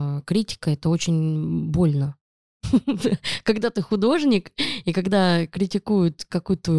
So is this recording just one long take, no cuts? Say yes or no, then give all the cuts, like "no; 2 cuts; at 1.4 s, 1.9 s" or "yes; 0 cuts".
yes; 0 cuts